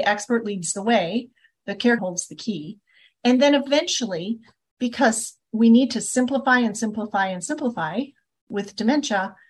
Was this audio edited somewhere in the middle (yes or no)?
yes